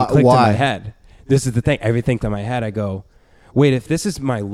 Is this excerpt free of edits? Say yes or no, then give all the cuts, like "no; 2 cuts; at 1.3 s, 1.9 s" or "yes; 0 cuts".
no; 1 cut; at 2.2 s